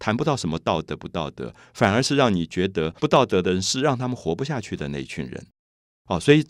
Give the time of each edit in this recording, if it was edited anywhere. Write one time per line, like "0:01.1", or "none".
0:03.0